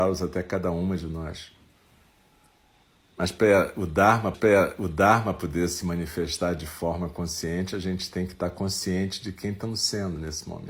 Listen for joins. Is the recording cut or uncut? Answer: cut